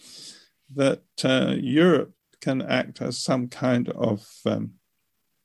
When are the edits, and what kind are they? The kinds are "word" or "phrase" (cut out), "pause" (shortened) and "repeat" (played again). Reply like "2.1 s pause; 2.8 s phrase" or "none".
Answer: none